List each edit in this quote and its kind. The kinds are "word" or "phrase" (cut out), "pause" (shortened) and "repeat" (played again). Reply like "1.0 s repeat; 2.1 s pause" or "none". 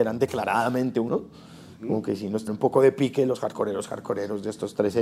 1.1 s word; 2.5 s word